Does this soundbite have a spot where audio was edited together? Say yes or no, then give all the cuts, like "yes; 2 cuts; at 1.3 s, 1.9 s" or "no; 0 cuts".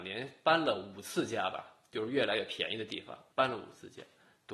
yes; 1 cut; at 3.3 s